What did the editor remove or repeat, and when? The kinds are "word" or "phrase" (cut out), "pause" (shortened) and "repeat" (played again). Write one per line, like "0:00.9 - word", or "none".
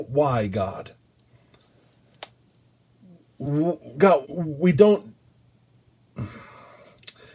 0:04.2 - word